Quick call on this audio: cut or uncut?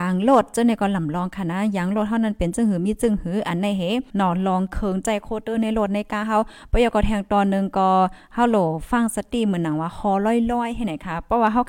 cut